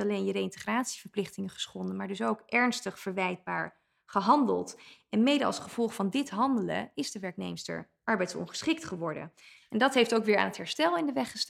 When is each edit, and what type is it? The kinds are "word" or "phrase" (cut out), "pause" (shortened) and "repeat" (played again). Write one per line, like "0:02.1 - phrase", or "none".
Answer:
none